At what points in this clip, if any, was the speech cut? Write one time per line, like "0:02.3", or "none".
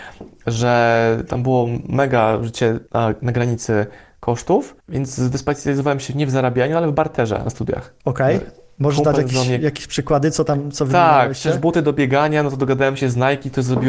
0:02.9
0:04.8
0:08.0